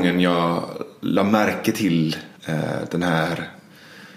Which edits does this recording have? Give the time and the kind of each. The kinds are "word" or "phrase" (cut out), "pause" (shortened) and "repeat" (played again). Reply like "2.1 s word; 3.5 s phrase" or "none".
2.4 s pause

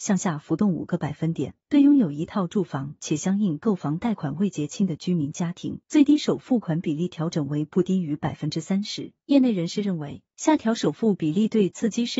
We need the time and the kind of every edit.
1.6 s pause; 5.8 s pause; 9.2 s pause; 10.3 s pause

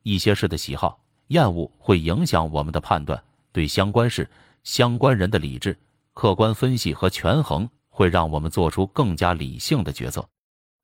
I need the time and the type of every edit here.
7.8 s pause

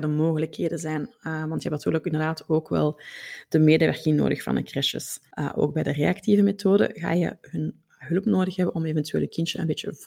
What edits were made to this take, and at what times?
5.3 s pause

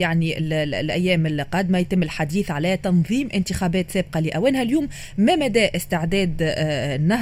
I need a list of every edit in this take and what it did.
none

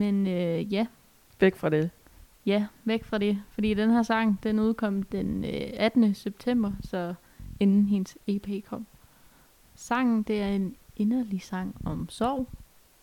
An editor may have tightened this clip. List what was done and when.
none

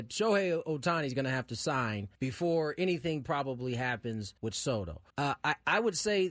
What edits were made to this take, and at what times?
2.2 s pause; 4.4 s pause; 5.1 s pause

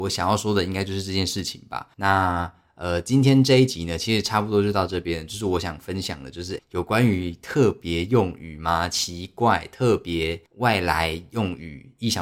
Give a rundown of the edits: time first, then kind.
1.9 s pause; 6.6 s word; 10.5 s pause

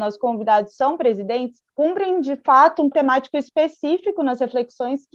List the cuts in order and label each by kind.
1.7 s pause; 2.9 s phrase

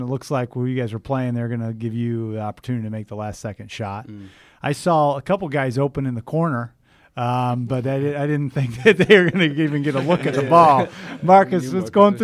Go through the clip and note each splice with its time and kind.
none

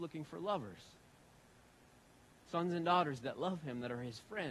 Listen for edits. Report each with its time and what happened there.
none

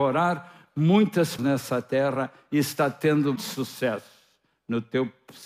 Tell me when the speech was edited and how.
1.4 s word; 3.4 s word

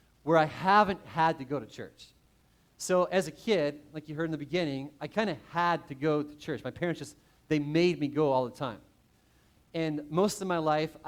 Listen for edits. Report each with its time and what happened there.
none

